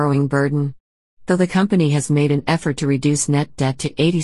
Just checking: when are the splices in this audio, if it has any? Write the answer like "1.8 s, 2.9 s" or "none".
none

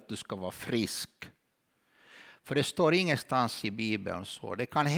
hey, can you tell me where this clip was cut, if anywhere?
none

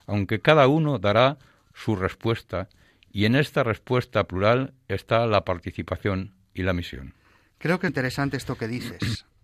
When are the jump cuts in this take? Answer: 7.9 s

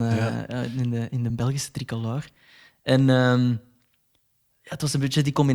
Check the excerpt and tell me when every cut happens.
none

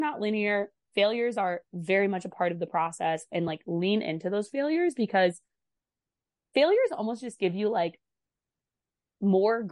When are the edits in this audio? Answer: none

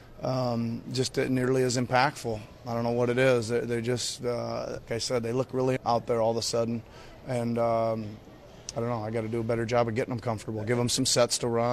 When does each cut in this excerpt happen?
4.9 s, 5.8 s

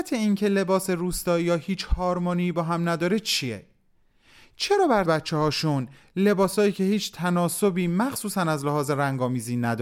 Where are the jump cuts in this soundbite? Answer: 5.1 s

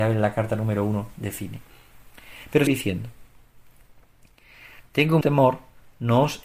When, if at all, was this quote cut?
2.7 s, 5.2 s

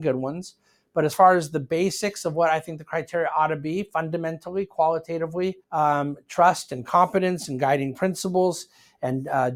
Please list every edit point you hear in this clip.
5.6 s

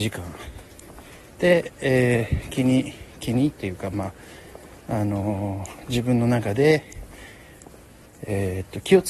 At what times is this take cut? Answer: none

